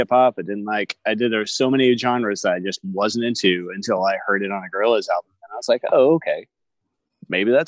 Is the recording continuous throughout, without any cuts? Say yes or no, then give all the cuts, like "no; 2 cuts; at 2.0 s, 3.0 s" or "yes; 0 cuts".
yes; 0 cuts